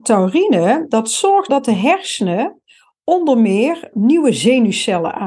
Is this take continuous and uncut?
no; 2 cuts; at 1.5 s, 3.9 s

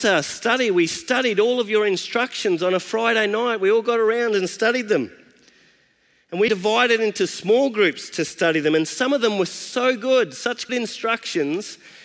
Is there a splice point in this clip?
yes; 2 cuts; at 6.5 s, 10.7 s

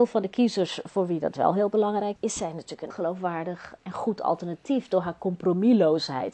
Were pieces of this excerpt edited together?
yes; 3 cuts; at 2.2 s, 2.9 s, 3.8 s

